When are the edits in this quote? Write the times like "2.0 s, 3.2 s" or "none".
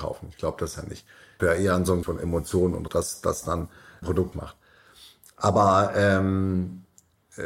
1.4 s, 2.0 s, 2.9 s, 4.0 s, 4.3 s